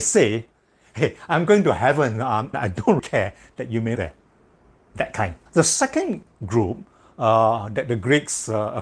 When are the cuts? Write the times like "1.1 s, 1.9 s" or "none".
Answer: 2.5 s, 3.0 s, 4.0 s, 5.5 s